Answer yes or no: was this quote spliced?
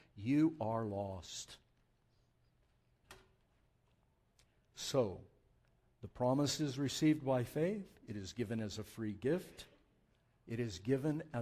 no